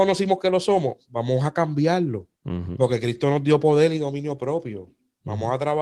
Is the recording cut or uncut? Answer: cut